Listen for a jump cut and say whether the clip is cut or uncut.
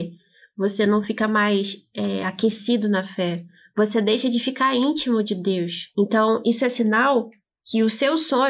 uncut